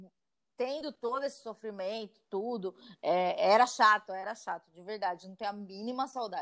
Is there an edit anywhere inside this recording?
no; 0 cuts

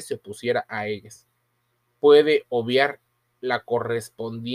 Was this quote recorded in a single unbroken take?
yes; 0 cuts

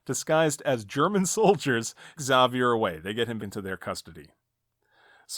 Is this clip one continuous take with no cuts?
no; 2 cuts; at 2.2 s, 3.4 s

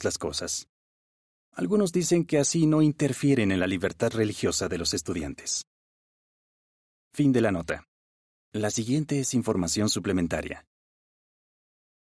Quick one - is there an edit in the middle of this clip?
yes; 1 cut; at 8.1 s

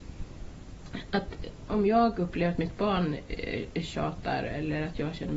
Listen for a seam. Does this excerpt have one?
no; 0 cuts

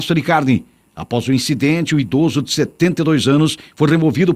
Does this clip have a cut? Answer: no; 0 cuts

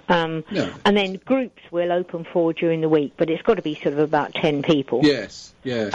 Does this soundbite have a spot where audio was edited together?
no; 0 cuts

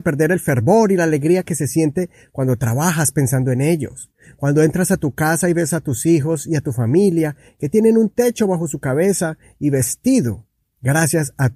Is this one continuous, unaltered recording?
yes; 0 cuts

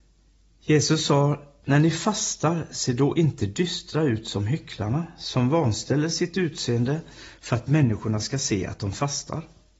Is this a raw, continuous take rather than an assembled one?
yes; 0 cuts

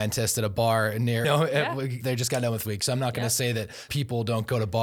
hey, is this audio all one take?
no; 4 cuts; at 1.2 s, 2.0 s, 2.6 s, 3.9 s

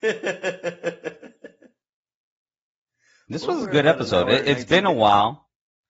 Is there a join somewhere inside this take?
no; 0 cuts

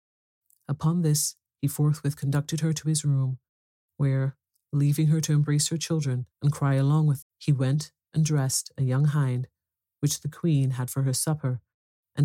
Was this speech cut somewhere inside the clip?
yes; 2 cuts; at 6.3 s, 7.2 s

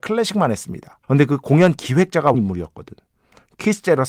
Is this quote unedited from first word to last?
no; 2 cuts; at 1.0 s, 2.3 s

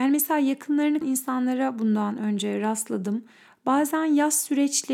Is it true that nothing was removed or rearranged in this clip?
no; 1 cut; at 1.0 s

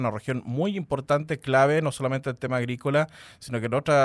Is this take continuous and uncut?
yes; 0 cuts

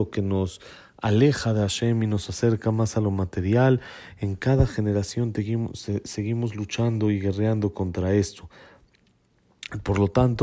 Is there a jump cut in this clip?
no; 0 cuts

